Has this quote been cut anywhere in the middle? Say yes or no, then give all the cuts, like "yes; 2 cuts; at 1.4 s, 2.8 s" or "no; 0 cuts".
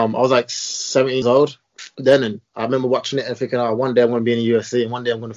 yes; 1 cut; at 1.2 s